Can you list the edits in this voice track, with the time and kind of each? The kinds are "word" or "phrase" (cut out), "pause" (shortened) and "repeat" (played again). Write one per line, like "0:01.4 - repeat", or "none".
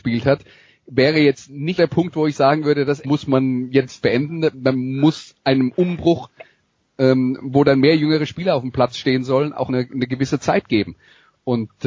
0:01.8 - word
0:03.0 - word
0:04.0 - word
0:09.7 - word